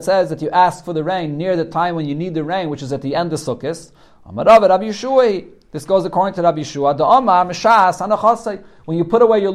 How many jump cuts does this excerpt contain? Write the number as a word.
zero